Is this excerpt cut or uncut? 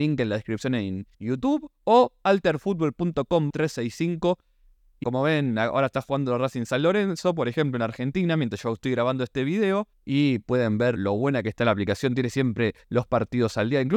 cut